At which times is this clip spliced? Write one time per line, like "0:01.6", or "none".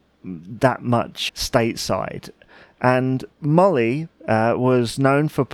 0:01.3